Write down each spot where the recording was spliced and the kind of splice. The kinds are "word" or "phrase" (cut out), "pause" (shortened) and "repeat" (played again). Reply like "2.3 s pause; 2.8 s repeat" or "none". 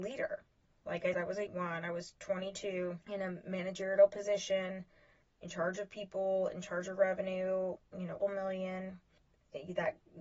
1.1 s word; 1.5 s word; 3.0 s pause; 7.8 s word; 8.2 s word